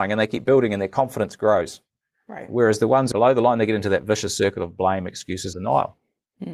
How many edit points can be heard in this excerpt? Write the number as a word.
two